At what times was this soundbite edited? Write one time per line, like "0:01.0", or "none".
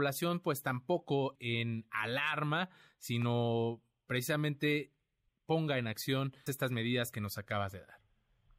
0:01.4
0:05.3
0:06.5